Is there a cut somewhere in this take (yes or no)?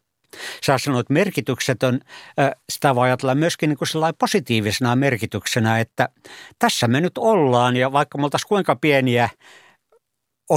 yes